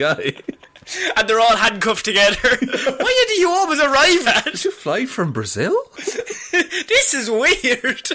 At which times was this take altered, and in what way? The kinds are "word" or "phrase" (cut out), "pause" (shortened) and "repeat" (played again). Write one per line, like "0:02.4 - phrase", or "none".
0:04.2 - word

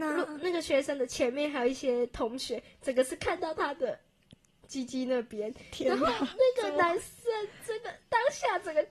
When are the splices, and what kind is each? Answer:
none

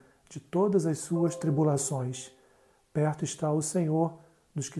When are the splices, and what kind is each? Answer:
none

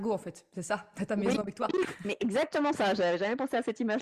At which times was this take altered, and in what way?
none

